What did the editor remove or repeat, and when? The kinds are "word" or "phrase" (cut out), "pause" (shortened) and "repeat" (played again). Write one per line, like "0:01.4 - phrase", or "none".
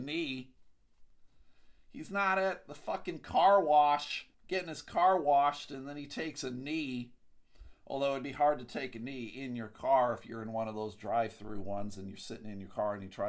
0:04.3 - pause